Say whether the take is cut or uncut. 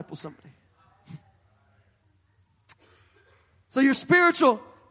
uncut